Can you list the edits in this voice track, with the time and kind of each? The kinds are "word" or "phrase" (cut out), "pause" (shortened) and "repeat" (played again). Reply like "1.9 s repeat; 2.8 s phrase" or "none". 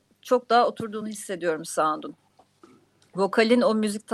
none